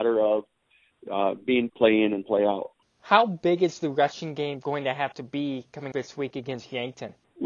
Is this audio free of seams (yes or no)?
no